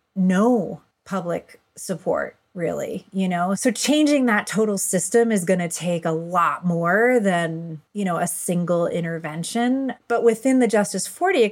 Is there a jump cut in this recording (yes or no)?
yes